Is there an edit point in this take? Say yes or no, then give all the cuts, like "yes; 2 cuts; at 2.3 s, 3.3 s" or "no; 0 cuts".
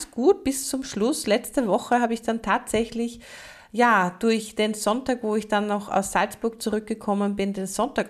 no; 0 cuts